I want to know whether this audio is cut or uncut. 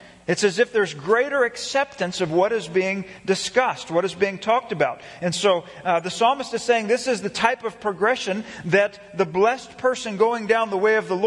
uncut